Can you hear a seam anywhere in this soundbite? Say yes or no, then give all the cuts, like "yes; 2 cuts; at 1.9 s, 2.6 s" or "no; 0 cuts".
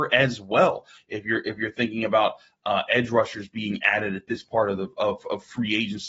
no; 0 cuts